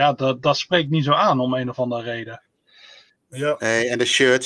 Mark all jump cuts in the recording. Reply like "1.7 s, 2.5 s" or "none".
none